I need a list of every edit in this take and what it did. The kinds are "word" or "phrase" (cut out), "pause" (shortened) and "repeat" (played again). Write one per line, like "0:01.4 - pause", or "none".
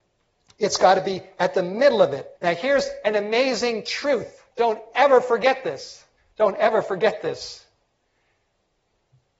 0:02.4 - pause
0:04.5 - pause
0:06.2 - pause